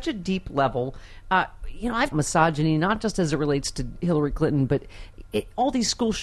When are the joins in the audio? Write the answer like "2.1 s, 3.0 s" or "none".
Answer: 2.1 s